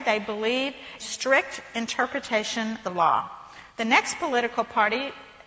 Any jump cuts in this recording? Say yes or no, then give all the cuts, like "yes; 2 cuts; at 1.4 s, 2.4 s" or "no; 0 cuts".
yes; 3 cuts; at 1.0 s, 2.8 s, 3.7 s